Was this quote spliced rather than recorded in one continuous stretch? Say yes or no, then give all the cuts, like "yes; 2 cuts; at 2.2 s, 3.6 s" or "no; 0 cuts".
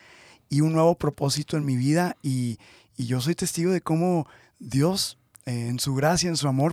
no; 0 cuts